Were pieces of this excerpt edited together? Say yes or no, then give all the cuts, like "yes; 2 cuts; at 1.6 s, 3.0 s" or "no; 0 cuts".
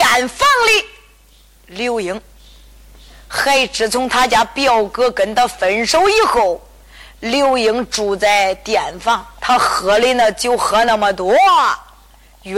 yes; 1 cut; at 9.4 s